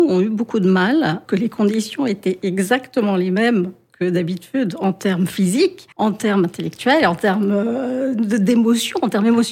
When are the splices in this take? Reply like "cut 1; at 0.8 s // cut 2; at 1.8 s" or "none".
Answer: cut 1; at 1.3 s // cut 2; at 5.9 s